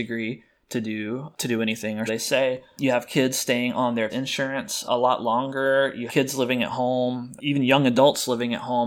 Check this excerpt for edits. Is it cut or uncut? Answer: cut